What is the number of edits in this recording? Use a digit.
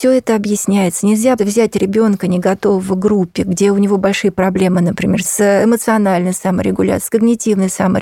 2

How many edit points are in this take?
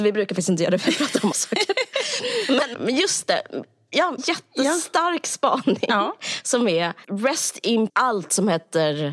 5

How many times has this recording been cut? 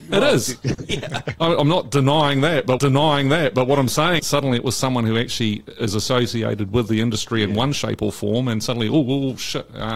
2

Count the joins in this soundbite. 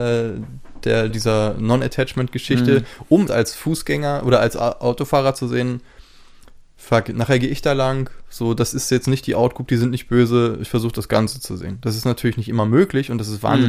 2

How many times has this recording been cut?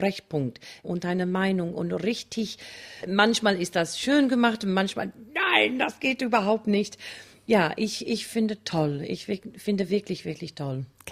0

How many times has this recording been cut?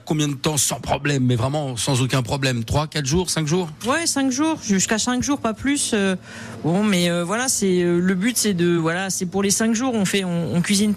0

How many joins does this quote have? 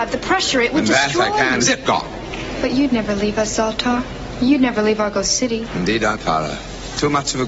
2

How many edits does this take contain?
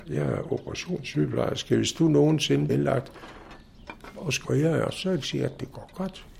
3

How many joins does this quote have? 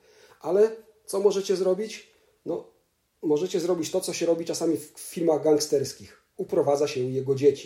0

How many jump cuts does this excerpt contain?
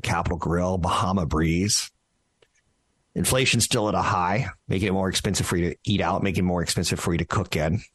1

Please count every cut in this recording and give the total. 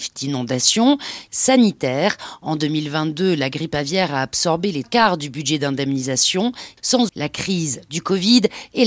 3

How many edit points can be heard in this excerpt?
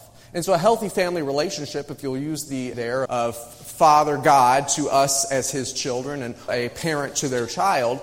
3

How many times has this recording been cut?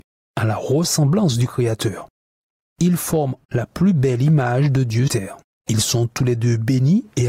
2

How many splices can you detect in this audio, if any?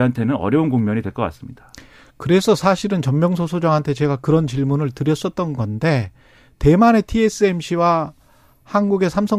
0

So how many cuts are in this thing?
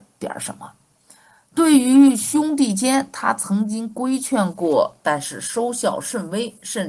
0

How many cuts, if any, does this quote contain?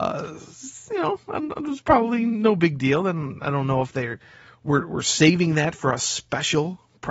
0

